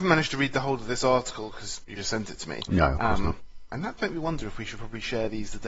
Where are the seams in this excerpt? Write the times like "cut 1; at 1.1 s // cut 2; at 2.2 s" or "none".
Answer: cut 1; at 2.0 s // cut 2; at 4.0 s